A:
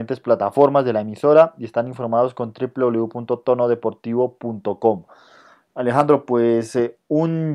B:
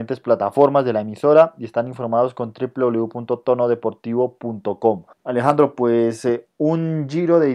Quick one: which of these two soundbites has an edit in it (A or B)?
B